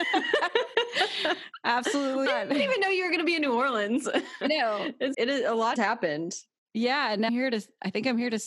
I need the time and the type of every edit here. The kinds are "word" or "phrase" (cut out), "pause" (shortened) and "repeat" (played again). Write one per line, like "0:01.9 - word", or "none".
0:02.3 - word
0:04.4 - word
0:05.1 - word
0:05.8 - word
0:07.3 - word